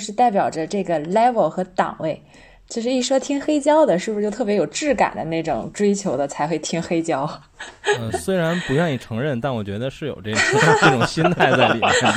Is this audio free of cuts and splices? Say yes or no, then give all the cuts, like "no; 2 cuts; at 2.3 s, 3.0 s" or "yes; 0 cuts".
yes; 0 cuts